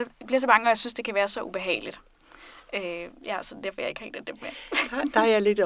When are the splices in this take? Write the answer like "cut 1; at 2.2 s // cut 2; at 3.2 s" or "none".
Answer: none

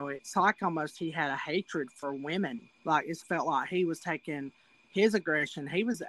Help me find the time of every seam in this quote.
cut 1; at 2.8 s // cut 2; at 3.2 s

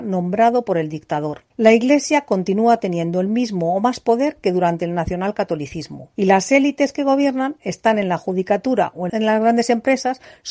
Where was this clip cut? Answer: cut 1; at 1.5 s // cut 2; at 6.1 s

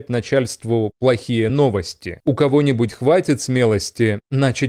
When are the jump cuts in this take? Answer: none

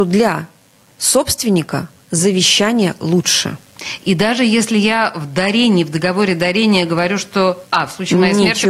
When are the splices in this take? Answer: cut 1; at 7.7 s

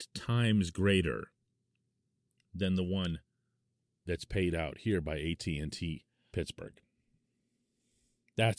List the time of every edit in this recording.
cut 1; at 6.3 s

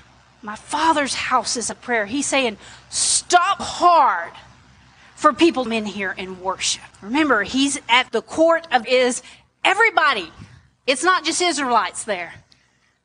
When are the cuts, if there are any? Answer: cut 1; at 1.7 s // cut 2; at 3.6 s // cut 3; at 5.7 s // cut 4; at 6.9 s // cut 5; at 8.1 s // cut 6; at 8.8 s

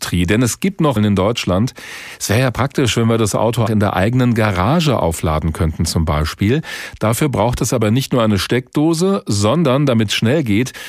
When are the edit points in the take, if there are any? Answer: cut 1; at 1.0 s // cut 2; at 3.7 s

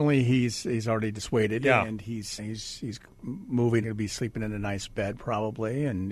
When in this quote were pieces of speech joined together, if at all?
cut 1; at 2.4 s // cut 2; at 3.8 s

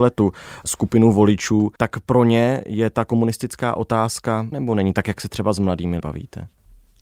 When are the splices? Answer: cut 1; at 1.8 s // cut 2; at 4.5 s // cut 3; at 6.0 s

